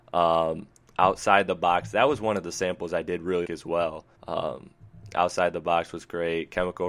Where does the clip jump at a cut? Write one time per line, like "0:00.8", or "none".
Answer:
0:03.4
0:04.1